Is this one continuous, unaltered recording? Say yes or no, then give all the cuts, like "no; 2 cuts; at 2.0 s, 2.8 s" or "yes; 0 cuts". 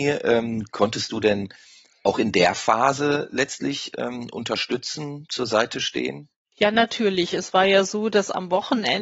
yes; 0 cuts